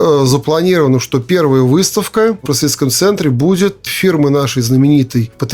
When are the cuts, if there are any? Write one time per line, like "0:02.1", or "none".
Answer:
0:02.5
0:03.9